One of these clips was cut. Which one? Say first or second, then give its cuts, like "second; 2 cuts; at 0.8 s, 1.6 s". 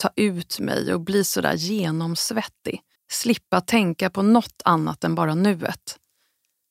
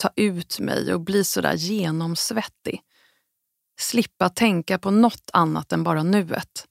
first; 1 cut; at 2.9 s